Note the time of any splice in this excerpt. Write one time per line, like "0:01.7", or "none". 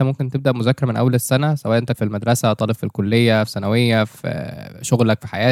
0:01.9

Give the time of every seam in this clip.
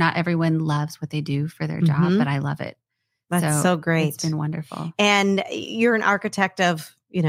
none

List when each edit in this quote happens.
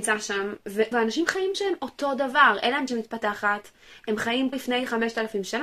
0:00.9
0:01.5
0:02.9
0:04.5

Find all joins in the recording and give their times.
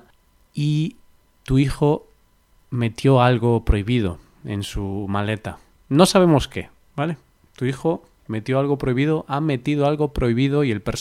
0:05.7

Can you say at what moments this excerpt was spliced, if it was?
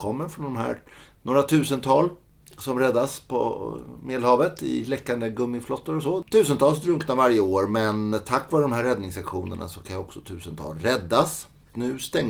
none

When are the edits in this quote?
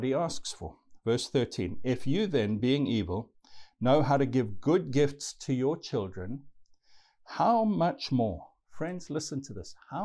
none

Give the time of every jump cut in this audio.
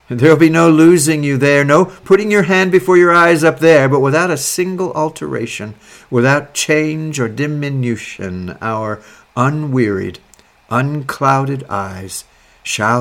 none

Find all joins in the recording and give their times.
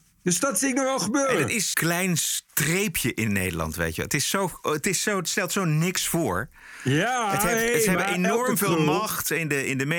0:01.7
0:02.5

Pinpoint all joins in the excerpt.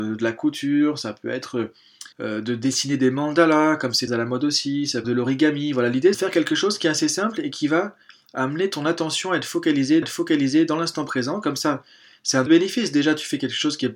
0:02.1
0:04.1
0:05.0
0:06.1
0:10.0
0:12.5

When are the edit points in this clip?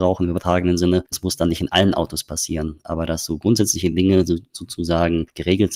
none

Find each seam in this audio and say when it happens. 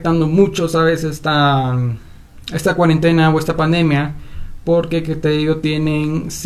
none

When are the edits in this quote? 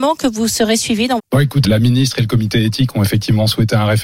0:01.2
0:01.6

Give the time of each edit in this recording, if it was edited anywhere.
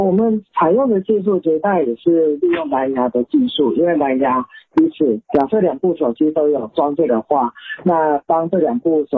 0:05.2
0:07.1

